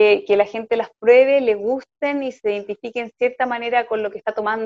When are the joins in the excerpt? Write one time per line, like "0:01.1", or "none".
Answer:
none

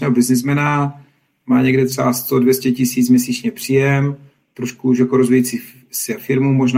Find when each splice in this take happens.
none

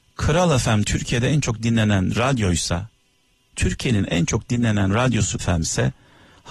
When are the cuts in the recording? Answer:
0:05.4

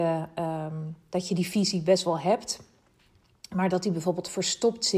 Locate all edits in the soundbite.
none

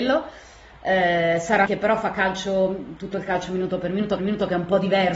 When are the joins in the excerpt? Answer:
0:01.7
0:04.2

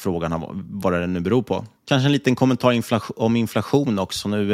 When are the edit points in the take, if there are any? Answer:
0:01.8

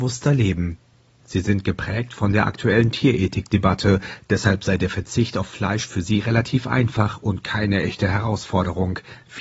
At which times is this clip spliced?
none

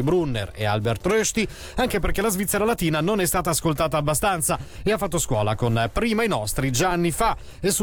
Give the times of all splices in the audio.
none

